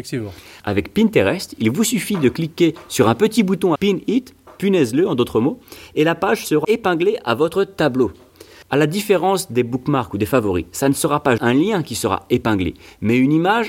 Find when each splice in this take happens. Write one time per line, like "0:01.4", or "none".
0:03.8
0:06.6
0:11.4